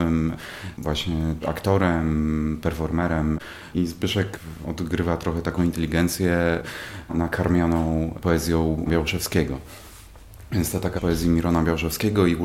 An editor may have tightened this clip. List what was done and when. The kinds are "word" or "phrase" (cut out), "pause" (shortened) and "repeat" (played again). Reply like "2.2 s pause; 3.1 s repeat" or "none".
1.4 s word; 3.7 s word; 4.6 s word; 5.6 s word; 8.9 s word; 11.0 s word